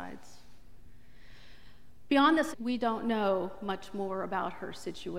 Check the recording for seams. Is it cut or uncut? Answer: cut